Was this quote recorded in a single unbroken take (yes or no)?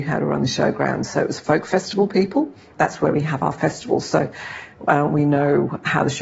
yes